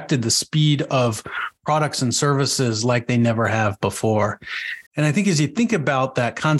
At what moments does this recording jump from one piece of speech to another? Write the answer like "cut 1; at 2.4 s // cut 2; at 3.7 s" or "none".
cut 1; at 4.9 s

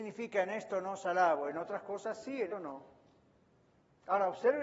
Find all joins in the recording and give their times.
cut 1; at 2.5 s

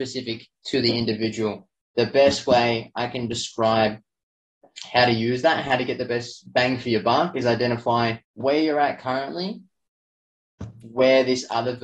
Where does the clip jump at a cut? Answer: cut 1; at 8.2 s

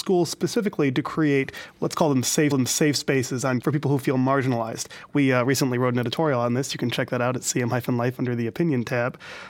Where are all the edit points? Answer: cut 1; at 2.5 s // cut 2; at 3.6 s

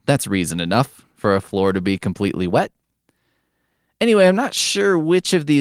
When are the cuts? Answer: none

